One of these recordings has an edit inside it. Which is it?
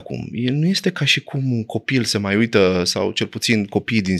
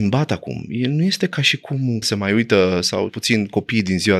second; 2 cuts; at 2.0 s, 3.1 s

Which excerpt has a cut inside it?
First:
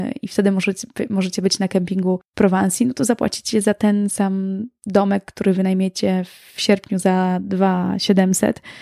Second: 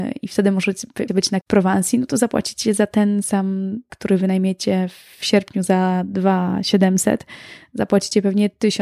second; 3 cuts; at 1.1 s, 1.4 s, 3.9 s

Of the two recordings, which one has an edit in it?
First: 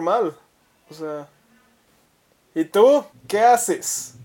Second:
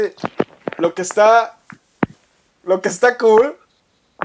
first; 1 cut; at 3.1 s

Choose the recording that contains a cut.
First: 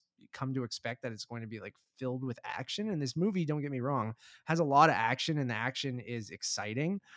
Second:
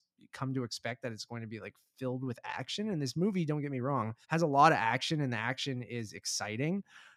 second; 1 cut; at 4.2 s

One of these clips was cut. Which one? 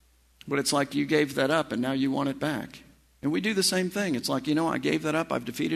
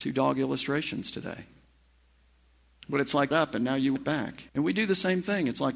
second; 3 cuts; at 3.3 s, 4.0 s, 4.5 s

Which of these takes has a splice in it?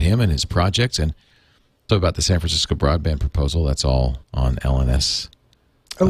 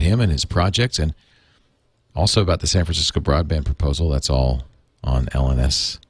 first; 2 cuts; at 1.9 s, 4.2 s

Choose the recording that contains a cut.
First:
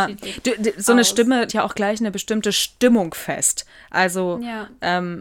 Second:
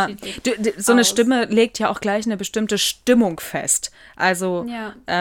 first; 1 cut; at 1.5 s

